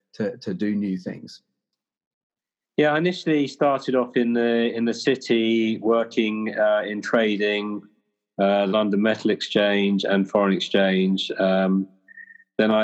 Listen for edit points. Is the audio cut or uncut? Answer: uncut